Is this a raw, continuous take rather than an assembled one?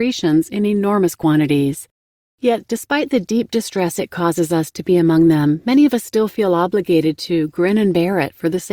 yes; 0 cuts

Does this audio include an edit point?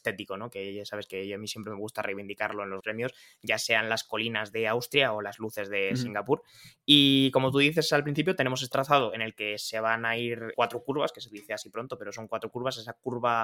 yes; 3 cuts; at 2.8 s, 8.7 s, 10.5 s

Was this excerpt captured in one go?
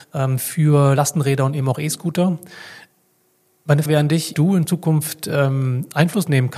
no; 2 cuts; at 3.9 s, 4.3 s

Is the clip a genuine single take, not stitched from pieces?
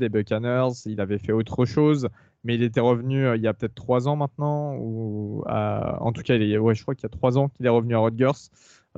yes; 0 cuts

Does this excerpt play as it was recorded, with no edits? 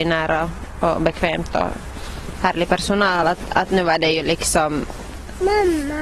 yes; 0 cuts

